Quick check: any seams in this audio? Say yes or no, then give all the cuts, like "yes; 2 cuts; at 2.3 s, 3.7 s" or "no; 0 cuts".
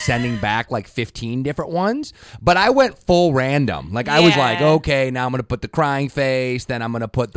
yes; 1 cut; at 4.3 s